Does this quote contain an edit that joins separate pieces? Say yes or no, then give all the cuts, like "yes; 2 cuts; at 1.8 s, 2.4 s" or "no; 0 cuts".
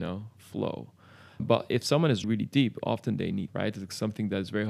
yes; 3 cuts; at 1.4 s, 2.2 s, 3.5 s